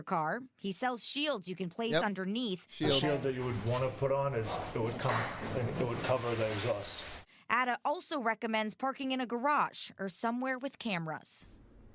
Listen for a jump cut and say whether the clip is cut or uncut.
uncut